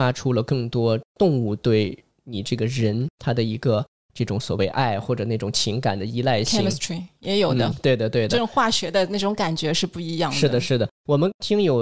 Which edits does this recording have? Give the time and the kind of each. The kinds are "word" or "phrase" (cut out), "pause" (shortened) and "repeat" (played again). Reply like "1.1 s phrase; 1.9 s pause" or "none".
none